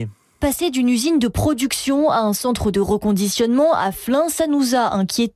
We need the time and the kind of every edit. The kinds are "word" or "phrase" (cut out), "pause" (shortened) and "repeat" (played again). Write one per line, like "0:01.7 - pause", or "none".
none